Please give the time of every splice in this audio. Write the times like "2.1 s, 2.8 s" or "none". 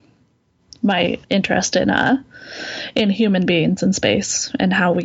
1.2 s

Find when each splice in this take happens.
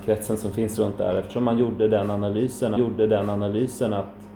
2.8 s

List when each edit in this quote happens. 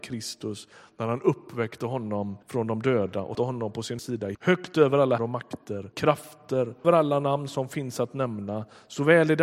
2.4 s, 3.3 s, 4.0 s, 4.3 s, 5.2 s, 5.9 s, 6.8 s

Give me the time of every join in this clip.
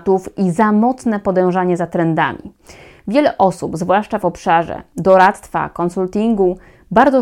none

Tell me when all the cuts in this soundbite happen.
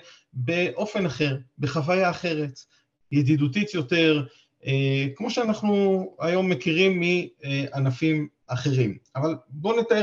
none

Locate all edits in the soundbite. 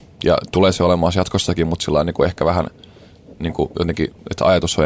none

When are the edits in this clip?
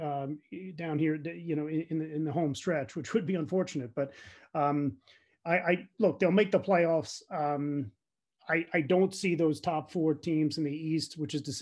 none

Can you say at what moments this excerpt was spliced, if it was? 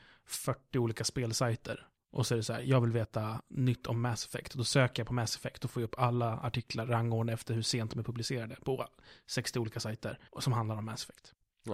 10.3 s

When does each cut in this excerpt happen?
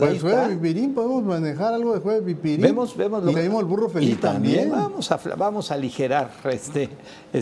3.3 s

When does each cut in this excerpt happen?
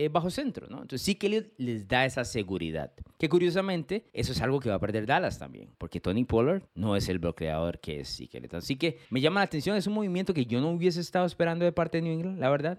3.1 s, 4.1 s, 5.7 s, 6.7 s, 9.0 s

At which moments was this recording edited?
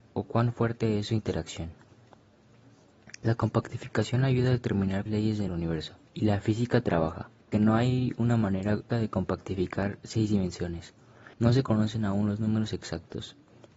5.1 s, 5.5 s, 6.0 s, 7.5 s, 8.9 s, 11.3 s

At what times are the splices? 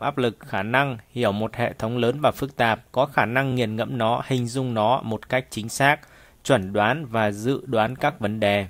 none

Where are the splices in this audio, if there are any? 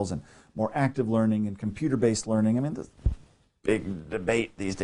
none

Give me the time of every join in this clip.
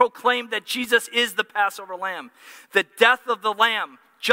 none

